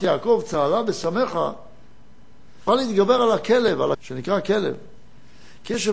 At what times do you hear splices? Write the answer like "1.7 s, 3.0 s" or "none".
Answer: 2.7 s, 3.9 s

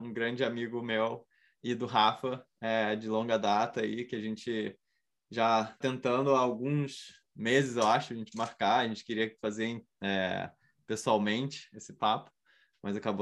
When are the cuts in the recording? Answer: 5.8 s

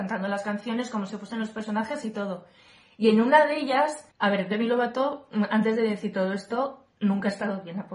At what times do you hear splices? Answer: 4.1 s

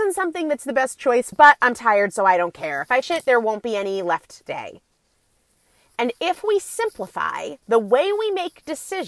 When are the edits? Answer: 1.3 s, 3.0 s, 4.5 s, 7.6 s

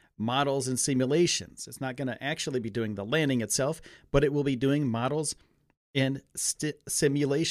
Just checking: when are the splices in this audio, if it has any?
none

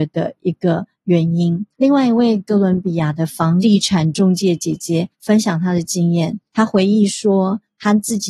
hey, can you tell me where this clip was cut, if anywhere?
1.7 s, 5.1 s, 6.5 s

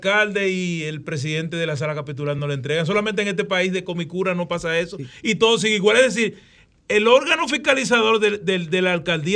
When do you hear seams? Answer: none

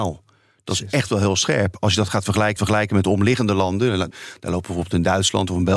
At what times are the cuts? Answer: 2.6 s, 4.1 s

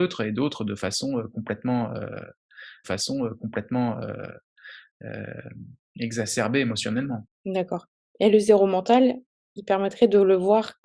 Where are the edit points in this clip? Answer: 2.8 s, 7.3 s

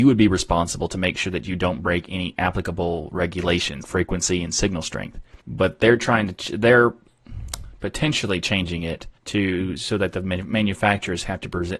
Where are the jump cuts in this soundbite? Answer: 3.8 s, 5.4 s, 9.2 s

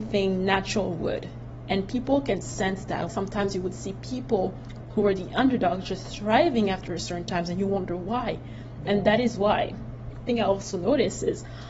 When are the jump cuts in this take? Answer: 3.1 s, 10.3 s

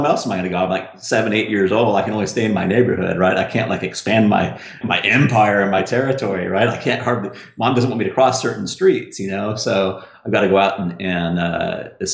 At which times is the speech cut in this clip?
4.8 s

